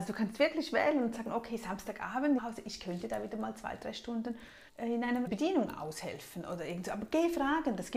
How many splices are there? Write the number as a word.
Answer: three